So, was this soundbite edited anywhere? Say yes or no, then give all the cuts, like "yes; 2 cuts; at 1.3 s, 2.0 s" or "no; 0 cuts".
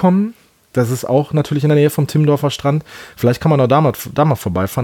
no; 0 cuts